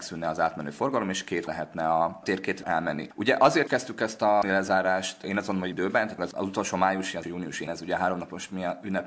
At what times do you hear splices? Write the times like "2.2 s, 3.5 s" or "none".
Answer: 1.5 s, 2.6 s, 3.7 s, 4.4 s, 5.7 s, 6.2 s, 7.2 s, 7.7 s